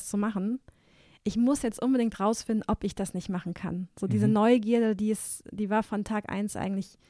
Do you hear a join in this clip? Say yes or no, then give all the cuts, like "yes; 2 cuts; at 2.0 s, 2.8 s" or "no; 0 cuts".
no; 0 cuts